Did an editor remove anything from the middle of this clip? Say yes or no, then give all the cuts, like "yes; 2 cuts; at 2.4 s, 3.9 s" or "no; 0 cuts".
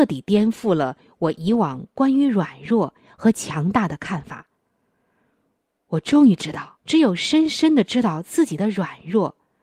yes; 1 cut; at 6.8 s